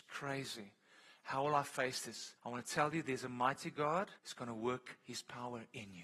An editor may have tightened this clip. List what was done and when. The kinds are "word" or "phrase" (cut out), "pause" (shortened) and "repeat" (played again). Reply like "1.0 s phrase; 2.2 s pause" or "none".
2.4 s pause; 4.2 s pause